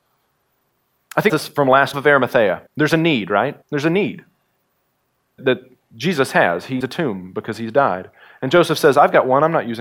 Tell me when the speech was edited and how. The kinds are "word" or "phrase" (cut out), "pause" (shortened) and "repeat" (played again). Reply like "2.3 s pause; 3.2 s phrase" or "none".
1.3 s word; 1.9 s phrase; 2.7 s pause; 3.6 s pause; 5.4 s word; 6.8 s word